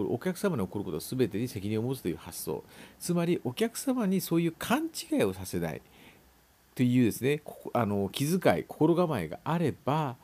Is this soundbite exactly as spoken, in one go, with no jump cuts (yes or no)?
yes